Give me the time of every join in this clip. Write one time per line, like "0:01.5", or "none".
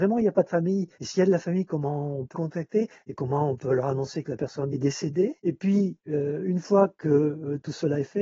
0:00.9
0:02.3
0:04.7